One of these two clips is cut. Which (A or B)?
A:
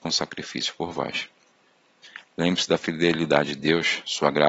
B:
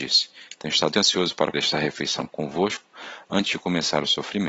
B